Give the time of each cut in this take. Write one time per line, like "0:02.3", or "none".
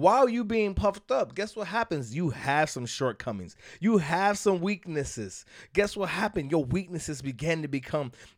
none